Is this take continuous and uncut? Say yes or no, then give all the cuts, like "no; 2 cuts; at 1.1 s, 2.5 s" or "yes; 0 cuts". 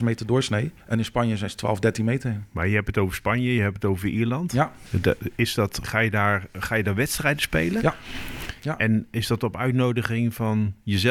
no; 1 cut; at 5.8 s